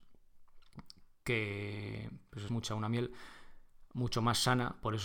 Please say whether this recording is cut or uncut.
cut